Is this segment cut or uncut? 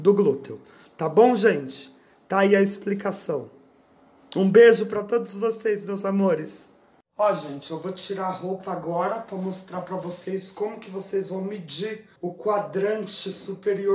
cut